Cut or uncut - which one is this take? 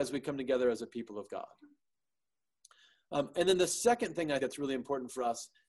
cut